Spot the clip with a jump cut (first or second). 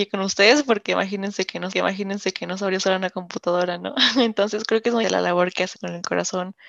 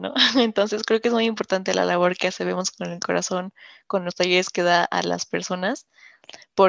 first